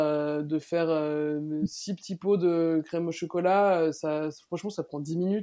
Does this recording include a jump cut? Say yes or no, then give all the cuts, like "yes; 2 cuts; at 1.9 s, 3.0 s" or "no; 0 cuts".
no; 0 cuts